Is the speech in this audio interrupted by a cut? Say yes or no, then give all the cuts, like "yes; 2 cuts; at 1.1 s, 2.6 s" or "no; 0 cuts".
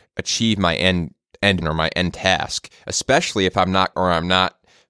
yes; 2 cuts; at 1.6 s, 3.9 s